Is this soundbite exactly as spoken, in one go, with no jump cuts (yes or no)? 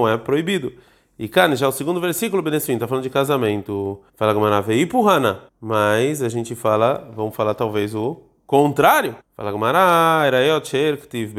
no